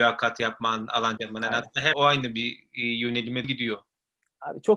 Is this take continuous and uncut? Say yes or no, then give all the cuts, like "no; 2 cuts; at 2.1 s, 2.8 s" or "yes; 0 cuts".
no; 3 cuts; at 1.2 s, 1.9 s, 3.4 s